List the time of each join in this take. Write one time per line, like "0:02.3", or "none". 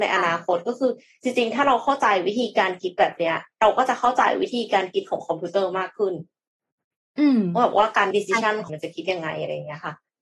0:08.1
0:08.7